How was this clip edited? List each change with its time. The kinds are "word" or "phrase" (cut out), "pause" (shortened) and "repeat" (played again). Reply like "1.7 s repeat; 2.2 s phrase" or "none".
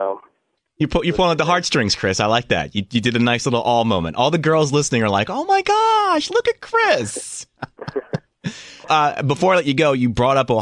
8.8 s word